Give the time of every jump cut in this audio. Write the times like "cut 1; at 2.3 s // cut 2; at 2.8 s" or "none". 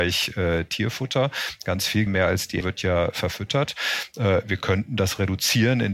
cut 1; at 2.1 s // cut 2; at 2.6 s